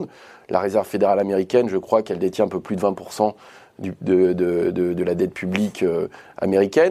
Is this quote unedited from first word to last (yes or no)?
yes